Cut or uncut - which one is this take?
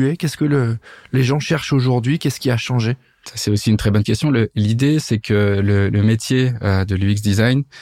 uncut